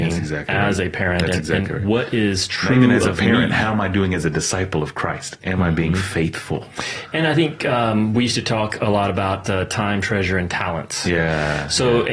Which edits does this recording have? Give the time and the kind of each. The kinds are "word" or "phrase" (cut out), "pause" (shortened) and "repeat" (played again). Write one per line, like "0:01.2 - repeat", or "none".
none